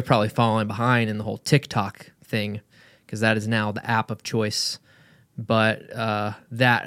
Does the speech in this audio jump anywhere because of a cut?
no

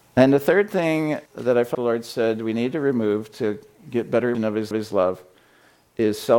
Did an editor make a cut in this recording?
yes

